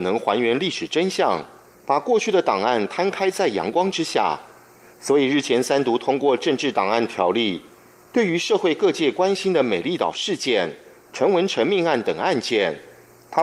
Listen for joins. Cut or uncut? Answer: uncut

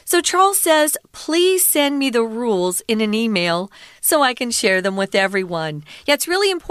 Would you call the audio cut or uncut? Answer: uncut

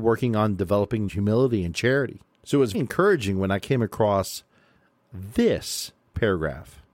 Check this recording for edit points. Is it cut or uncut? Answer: cut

